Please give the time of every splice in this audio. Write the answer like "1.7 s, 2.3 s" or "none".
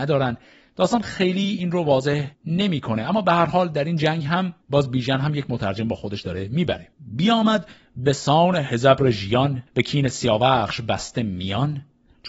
2.3 s, 4.6 s, 6.9 s, 9.7 s